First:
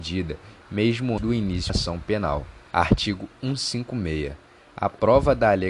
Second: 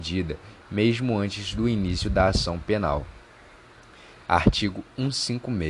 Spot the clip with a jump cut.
first; 3 cuts; at 1.2 s, 1.7 s, 2.7 s

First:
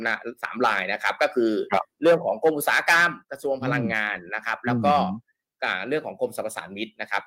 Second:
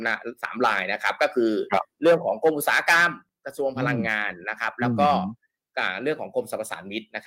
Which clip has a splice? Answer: first; 1 cut; at 3.2 s

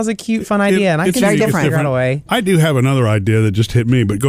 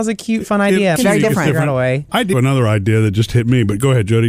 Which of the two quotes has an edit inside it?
second; 2 cuts; at 1.0 s, 2.3 s

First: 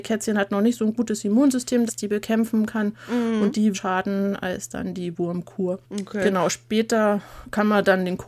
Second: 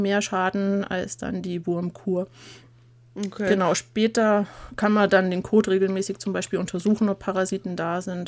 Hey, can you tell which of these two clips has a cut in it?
first; 3 cuts; at 1.9 s, 3.7 s, 5.8 s

